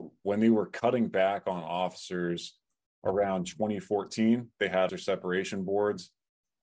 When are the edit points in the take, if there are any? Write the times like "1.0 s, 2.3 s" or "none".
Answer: 4.9 s